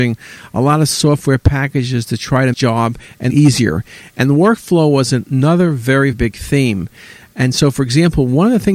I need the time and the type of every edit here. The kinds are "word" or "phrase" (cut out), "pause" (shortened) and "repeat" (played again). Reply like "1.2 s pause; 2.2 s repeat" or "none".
2.5 s phrase; 3.3 s word; 6.1 s word